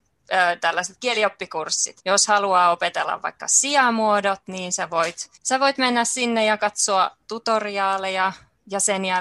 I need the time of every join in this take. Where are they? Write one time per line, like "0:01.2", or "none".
0:02.0
0:05.4